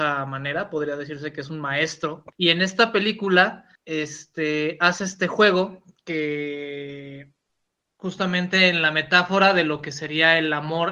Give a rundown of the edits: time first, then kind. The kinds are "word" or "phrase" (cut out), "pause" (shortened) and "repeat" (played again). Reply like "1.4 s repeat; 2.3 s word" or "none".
2.3 s pause; 3.8 s pause; 7.5 s pause